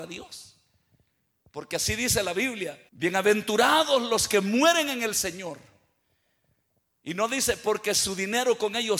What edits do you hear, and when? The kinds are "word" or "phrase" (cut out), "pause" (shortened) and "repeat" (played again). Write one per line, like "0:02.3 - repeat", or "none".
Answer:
0:02.9 - pause